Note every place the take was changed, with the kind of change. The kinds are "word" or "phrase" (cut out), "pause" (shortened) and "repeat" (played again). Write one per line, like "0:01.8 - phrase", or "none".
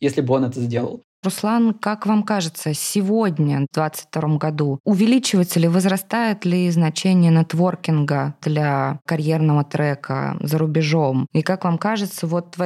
none